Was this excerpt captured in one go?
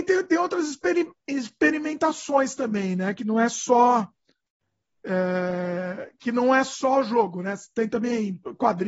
yes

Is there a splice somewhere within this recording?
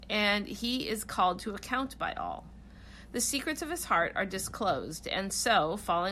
no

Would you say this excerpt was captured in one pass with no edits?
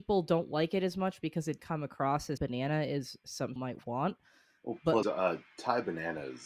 no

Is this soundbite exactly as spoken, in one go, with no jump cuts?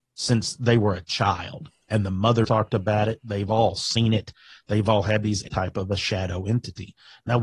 no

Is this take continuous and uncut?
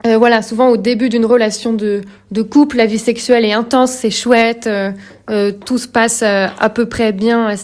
yes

